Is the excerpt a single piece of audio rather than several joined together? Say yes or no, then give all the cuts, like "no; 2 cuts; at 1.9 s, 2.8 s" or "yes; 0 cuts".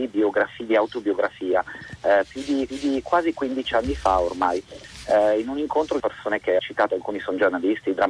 no; 3 cuts; at 2.7 s, 6.0 s, 6.6 s